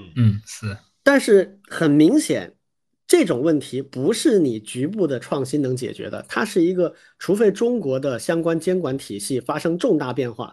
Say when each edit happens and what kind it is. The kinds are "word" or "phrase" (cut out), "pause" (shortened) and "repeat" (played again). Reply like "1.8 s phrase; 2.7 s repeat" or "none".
none